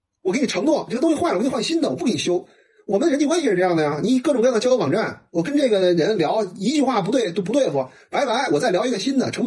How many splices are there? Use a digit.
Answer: 0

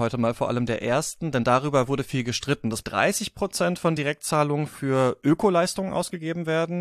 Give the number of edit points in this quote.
2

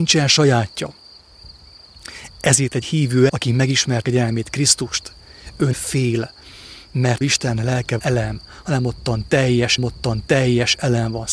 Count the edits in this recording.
7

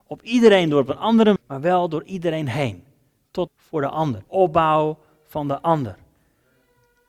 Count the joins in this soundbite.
3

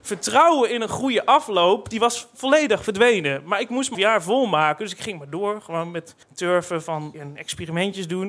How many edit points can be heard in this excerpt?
3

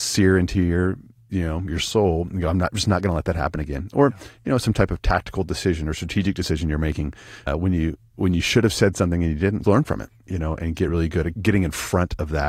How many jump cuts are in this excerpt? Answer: 3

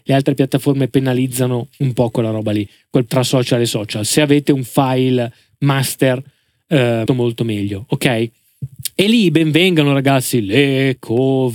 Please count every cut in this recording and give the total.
2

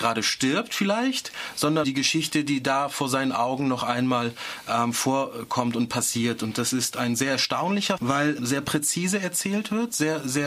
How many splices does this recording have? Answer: 3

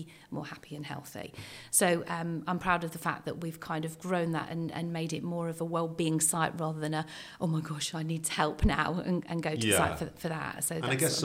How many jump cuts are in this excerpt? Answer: 0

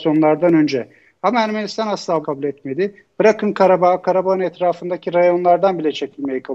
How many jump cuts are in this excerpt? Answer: 1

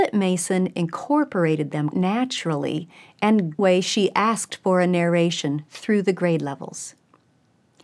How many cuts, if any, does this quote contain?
2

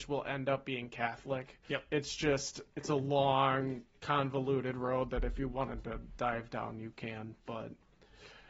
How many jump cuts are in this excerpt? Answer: 1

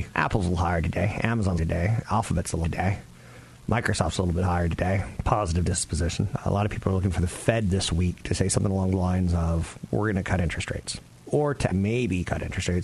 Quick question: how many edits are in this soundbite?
3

